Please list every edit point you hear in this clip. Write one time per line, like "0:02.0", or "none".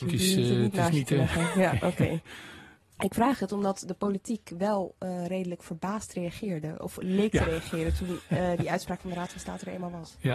none